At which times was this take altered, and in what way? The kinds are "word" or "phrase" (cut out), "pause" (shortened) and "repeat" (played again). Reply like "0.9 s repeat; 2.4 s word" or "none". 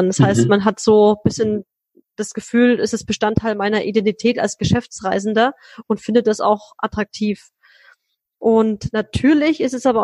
none